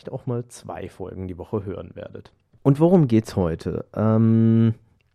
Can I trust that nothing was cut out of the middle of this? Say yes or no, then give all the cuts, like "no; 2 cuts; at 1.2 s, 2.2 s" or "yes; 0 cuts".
yes; 0 cuts